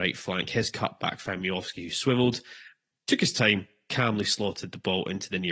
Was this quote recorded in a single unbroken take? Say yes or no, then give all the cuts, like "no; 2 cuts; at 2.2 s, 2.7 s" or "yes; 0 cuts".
yes; 0 cuts